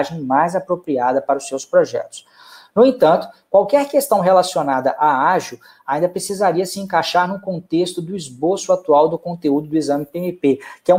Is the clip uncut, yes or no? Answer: yes